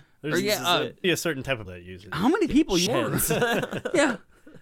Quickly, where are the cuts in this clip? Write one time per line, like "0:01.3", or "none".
0:01.0
0:01.7
0:02.5
0:02.9